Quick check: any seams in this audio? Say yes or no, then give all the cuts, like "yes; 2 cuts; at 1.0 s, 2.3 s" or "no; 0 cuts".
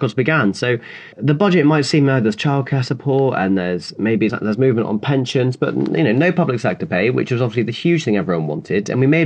yes; 2 cuts; at 1.1 s, 4.3 s